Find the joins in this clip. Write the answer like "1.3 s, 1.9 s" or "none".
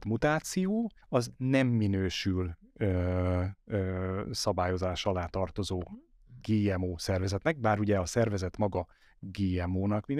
1.0 s